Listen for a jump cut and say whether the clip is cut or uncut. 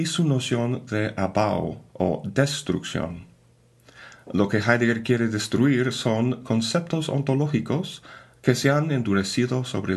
uncut